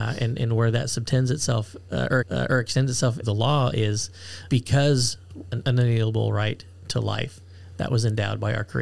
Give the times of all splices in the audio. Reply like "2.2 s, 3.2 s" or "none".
2.2 s, 3.2 s, 4.5 s, 5.4 s